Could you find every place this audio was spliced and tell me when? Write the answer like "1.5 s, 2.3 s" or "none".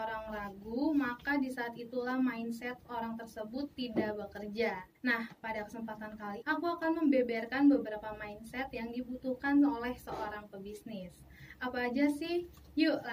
4.9 s, 6.4 s